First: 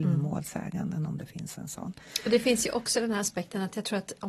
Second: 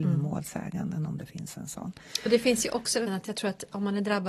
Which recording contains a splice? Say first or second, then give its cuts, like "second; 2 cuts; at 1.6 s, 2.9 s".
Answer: second; 1 cut; at 3.1 s